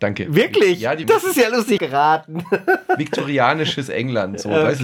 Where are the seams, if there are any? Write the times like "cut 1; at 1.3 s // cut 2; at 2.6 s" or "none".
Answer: cut 1; at 1.0 s // cut 2; at 1.8 s